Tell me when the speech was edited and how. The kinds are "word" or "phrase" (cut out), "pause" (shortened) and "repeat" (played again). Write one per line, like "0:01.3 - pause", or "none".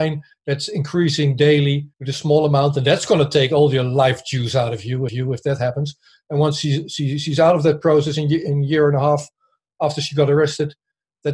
0:01.9 - pause
0:05.1 - repeat